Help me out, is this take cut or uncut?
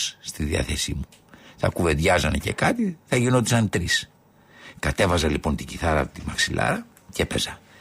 uncut